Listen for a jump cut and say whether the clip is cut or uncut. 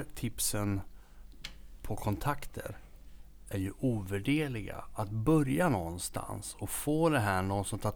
uncut